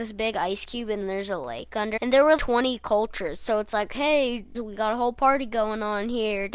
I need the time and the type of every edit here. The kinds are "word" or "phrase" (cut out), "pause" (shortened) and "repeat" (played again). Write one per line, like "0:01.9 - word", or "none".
0:01.0 - word
0:02.0 - word
0:02.4 - word
0:04.5 - word